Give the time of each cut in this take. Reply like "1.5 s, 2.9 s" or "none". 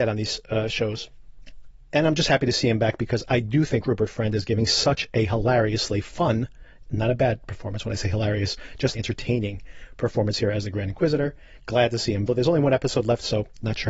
8.9 s, 12.3 s